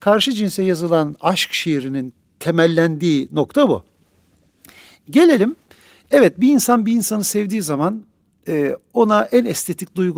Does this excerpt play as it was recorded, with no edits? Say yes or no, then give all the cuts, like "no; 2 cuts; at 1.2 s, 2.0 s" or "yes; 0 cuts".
yes; 0 cuts